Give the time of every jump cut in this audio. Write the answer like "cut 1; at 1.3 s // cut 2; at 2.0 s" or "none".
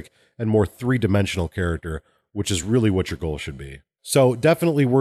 none